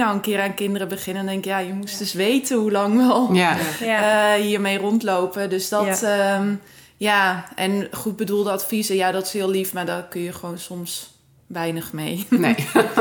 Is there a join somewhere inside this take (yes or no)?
no